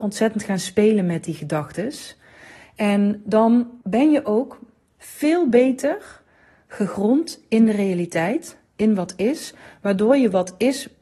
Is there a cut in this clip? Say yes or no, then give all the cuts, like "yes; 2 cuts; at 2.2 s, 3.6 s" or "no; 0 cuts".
yes; 1 cut; at 3.8 s